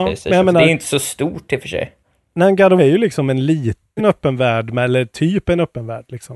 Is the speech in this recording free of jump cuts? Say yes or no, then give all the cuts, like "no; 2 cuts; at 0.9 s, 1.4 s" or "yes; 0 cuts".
no; 2 cuts; at 2.8 s, 4.0 s